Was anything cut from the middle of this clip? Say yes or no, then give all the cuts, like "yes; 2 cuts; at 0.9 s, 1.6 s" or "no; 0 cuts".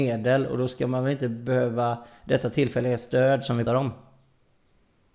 yes; 1 cut; at 3.7 s